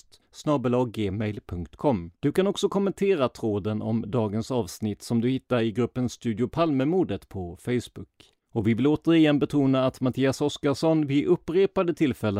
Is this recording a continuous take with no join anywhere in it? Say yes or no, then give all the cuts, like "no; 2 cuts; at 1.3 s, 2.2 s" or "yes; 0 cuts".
no; 2 cuts; at 2.2 s, 8.4 s